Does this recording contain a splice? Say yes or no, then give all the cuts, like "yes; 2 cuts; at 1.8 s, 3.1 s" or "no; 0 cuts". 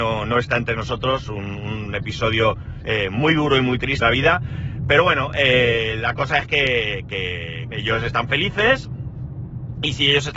yes; 2 cuts; at 4.0 s, 7.7 s